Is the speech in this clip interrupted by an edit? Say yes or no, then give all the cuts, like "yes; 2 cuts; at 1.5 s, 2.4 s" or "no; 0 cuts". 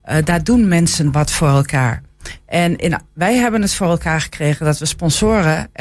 no; 0 cuts